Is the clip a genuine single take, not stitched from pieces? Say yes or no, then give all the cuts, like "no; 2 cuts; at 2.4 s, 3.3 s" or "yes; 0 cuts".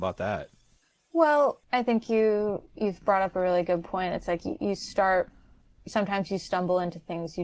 yes; 0 cuts